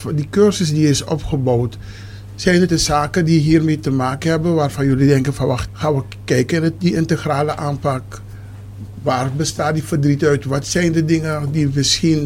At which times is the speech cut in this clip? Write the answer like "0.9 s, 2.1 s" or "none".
2.7 s, 5.7 s